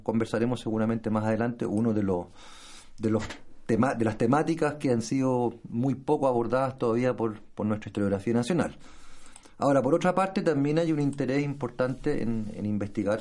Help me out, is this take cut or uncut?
uncut